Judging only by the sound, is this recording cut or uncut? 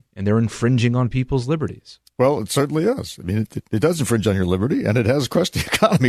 uncut